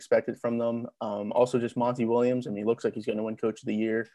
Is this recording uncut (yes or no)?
yes